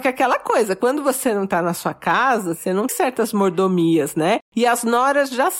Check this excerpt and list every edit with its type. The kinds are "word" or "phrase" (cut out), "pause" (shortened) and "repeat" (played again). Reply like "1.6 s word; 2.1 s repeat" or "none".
2.9 s word